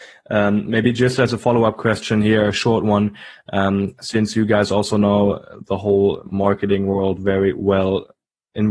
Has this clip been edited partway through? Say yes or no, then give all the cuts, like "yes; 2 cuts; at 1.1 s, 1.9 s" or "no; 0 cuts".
no; 0 cuts